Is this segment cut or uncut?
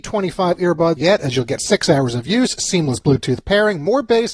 cut